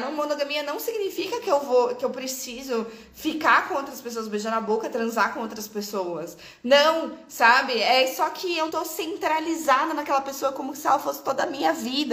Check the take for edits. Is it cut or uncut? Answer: cut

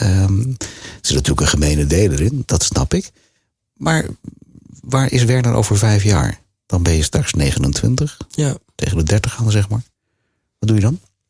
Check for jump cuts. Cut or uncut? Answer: uncut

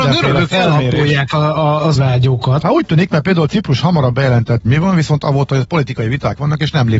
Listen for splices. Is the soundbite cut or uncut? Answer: cut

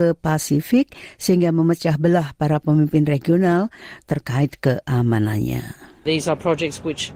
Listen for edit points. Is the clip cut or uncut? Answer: uncut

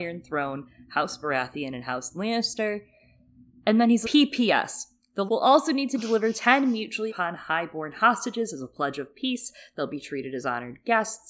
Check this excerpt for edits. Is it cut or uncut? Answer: cut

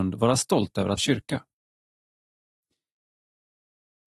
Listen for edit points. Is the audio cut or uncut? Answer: cut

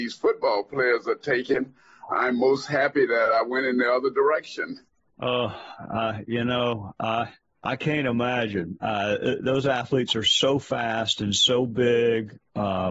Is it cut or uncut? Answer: uncut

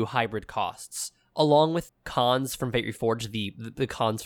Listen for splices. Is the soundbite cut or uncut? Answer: cut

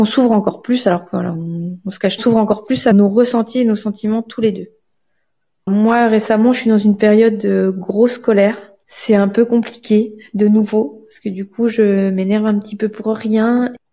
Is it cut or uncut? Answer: cut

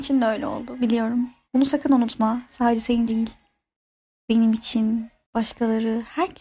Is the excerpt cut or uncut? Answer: cut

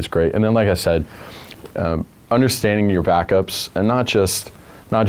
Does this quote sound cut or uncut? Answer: uncut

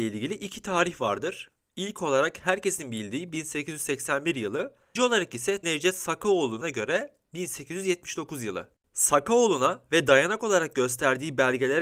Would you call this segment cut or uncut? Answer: cut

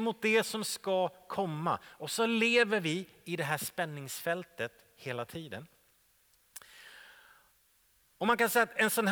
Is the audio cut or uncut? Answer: uncut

